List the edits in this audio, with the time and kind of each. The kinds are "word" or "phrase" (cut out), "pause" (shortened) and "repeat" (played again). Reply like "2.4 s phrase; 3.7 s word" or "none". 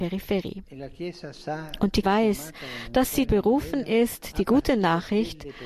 2.0 s word; 3.3 s word

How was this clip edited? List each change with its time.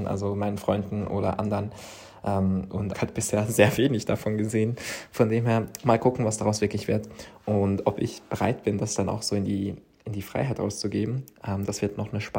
2.9 s phrase

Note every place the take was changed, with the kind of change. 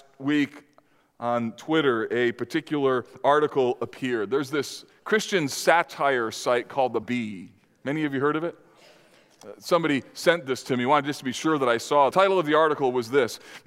7.0 s word; 12.1 s phrase

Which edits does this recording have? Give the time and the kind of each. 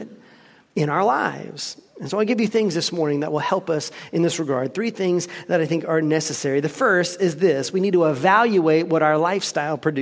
2.5 s word

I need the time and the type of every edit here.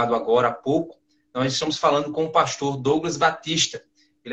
none

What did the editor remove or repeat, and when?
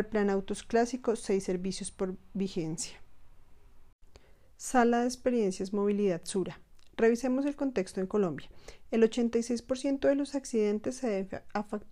none

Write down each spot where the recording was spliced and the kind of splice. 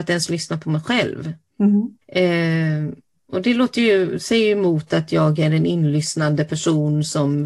2.0 s pause

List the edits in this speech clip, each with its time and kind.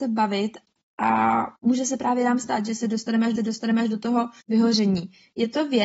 1.6 s pause; 3.4 s repeat; 4.4 s pause

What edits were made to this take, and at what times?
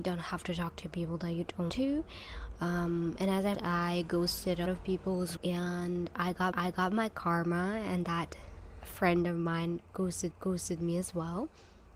1.7 s word; 3.5 s word; 4.7 s word; 5.4 s word; 6.5 s repeat; 10.3 s repeat

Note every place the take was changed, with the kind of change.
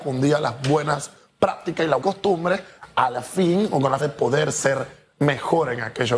2.0 s word; 4.0 s word

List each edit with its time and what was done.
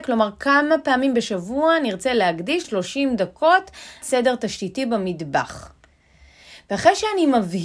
2.6 s phrase; 4.0 s word

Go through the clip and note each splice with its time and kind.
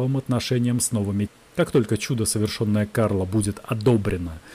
1.3 s word

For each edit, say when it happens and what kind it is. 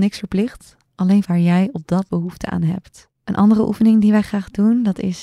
1.2 s phrase; 2.1 s word; 3.1 s pause

